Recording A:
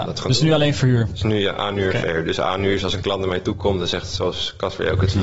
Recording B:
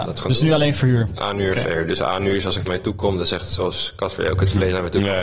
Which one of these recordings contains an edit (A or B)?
B